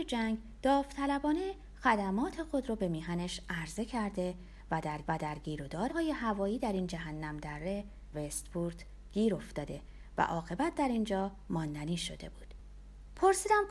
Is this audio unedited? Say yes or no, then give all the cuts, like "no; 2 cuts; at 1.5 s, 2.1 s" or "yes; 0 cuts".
no; 3 cuts; at 5.0 s, 5.9 s, 8.1 s